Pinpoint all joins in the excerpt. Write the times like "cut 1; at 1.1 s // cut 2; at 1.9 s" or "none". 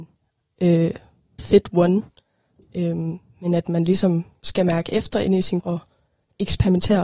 cut 1; at 1.4 s // cut 2; at 5.6 s